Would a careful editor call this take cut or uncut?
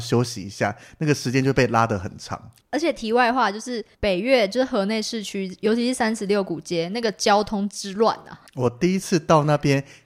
cut